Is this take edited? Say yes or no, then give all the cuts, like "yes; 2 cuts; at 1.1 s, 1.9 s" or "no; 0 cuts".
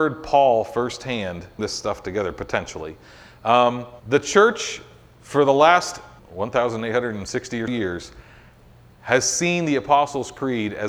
yes; 4 cuts; at 1.6 s, 4.0 s, 6.2 s, 7.7 s